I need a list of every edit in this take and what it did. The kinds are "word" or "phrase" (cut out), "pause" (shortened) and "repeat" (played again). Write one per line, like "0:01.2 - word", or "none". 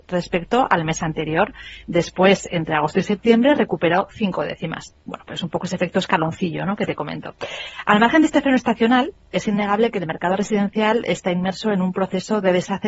none